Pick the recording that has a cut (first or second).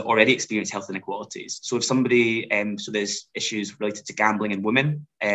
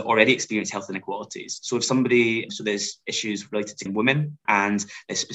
second